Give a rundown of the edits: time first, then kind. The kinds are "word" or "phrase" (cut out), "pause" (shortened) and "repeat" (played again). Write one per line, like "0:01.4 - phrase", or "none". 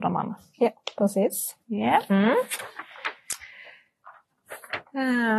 0:01.6 - pause